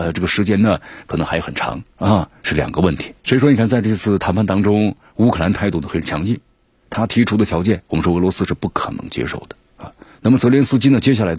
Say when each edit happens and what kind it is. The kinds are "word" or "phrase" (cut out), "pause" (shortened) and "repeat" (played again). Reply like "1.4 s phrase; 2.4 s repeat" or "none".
2.4 s pause; 3.2 s pause; 7.9 s pause; 10.1 s pause